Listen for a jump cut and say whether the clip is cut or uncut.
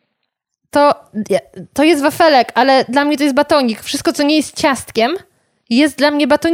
uncut